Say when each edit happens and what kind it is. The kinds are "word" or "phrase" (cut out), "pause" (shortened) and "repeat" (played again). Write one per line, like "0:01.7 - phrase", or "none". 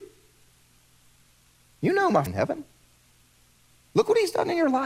0:02.3 - word